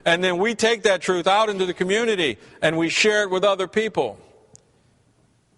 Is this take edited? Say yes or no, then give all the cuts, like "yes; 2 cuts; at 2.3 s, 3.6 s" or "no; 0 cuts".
no; 0 cuts